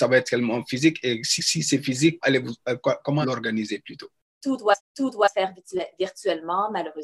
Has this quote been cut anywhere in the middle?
yes; 4 cuts; at 1.4 s, 2.2 s, 3.2 s, 4.8 s

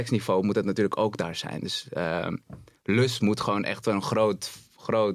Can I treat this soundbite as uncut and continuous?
yes; 0 cuts

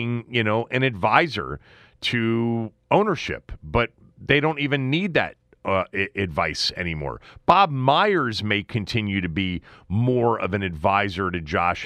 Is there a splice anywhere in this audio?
no; 0 cuts

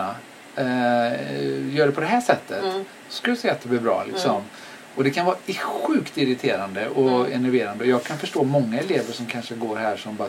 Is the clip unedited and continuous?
yes; 0 cuts

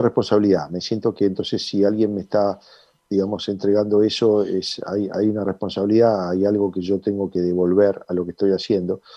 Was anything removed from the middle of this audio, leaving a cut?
no; 0 cuts

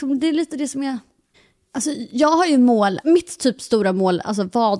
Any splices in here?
yes; 2 cuts; at 1.3 s, 3.0 s

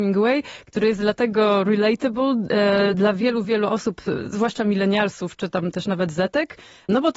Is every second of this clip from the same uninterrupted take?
yes; 0 cuts

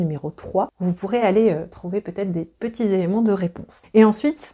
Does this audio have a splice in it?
no; 0 cuts

